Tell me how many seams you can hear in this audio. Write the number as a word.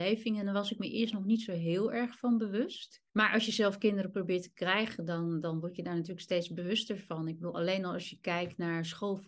one